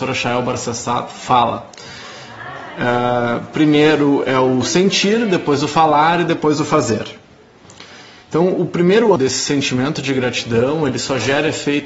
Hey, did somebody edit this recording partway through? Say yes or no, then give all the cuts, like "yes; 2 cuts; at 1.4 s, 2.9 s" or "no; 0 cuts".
yes; 1 cut; at 9.2 s